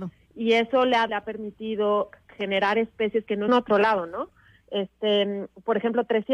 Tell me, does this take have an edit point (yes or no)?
yes